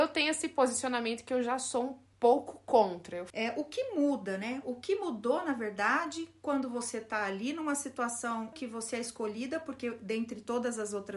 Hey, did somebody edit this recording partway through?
yes; 1 cut; at 8.5 s

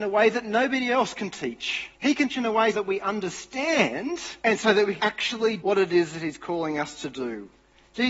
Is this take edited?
yes; 6 cuts; at 1.9 s, 2.3 s, 2.7 s, 4.4 s, 5.0 s, 5.6 s

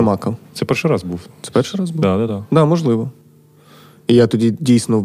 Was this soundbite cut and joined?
no; 0 cuts

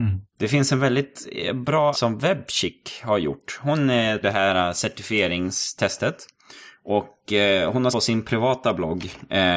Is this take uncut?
no; 3 cuts; at 1.9 s, 4.2 s, 7.9 s

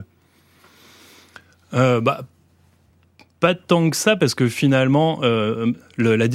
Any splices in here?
no; 0 cuts

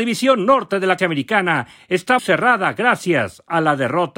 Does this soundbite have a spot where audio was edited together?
yes; 2 cuts; at 1.0 s, 2.2 s

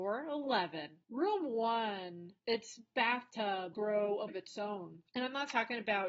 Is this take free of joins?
no; 5 cuts; at 1.0 s, 2.4 s, 3.7 s, 4.3 s, 5.1 s

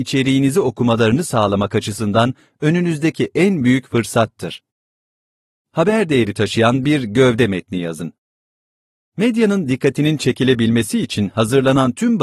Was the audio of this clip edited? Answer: no; 0 cuts

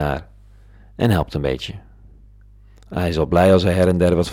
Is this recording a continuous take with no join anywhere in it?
yes; 0 cuts

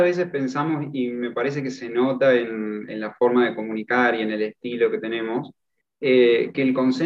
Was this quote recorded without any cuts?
yes; 0 cuts

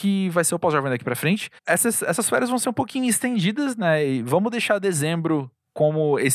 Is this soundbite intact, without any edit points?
yes; 0 cuts

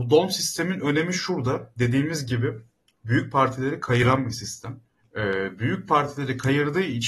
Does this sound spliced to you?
yes; 1 cut; at 4.9 s

